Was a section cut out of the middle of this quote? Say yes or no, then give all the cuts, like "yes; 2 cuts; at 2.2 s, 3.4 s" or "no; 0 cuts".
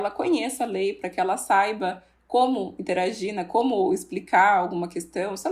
no; 0 cuts